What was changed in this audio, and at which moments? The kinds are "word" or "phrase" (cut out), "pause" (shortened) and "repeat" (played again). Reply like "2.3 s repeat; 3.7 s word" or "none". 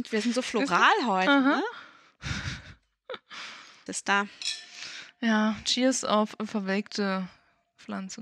3.9 s word